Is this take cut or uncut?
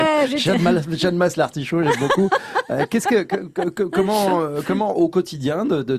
uncut